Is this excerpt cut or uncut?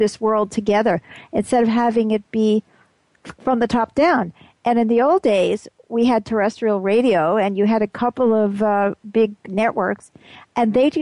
uncut